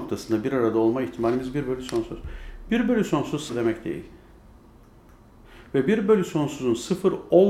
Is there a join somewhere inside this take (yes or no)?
yes